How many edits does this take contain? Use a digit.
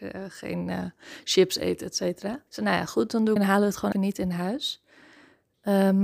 3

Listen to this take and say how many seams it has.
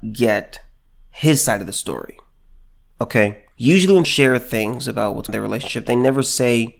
3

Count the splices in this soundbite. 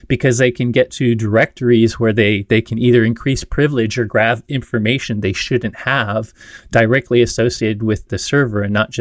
1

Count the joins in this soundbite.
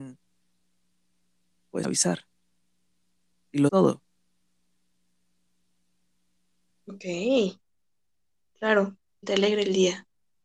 3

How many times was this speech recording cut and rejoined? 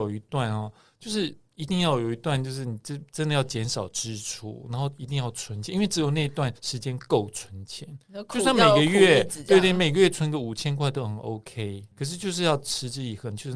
2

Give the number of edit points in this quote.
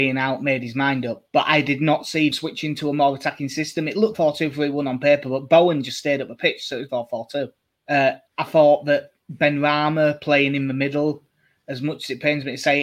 6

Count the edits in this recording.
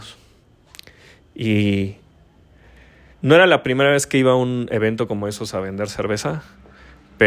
1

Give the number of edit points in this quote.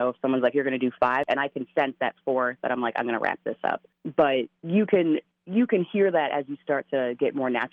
0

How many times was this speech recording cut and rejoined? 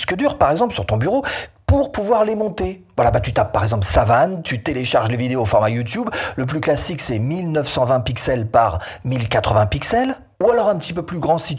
1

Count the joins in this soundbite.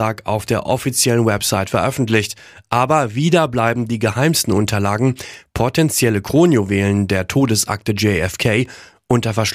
0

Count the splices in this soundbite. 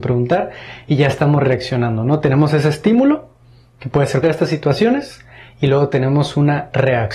1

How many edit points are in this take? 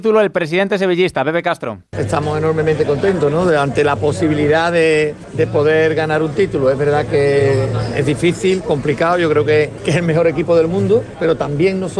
1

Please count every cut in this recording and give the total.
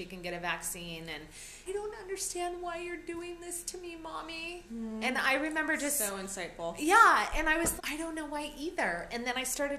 3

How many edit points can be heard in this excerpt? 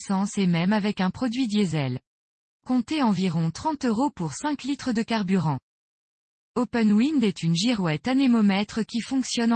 0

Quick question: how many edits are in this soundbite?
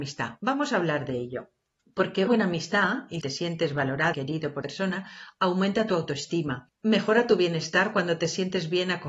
4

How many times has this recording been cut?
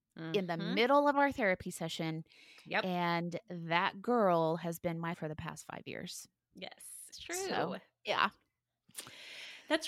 2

